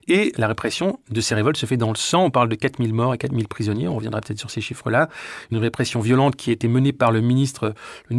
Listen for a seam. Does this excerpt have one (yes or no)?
no